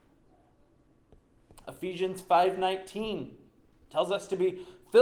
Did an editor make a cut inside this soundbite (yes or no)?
no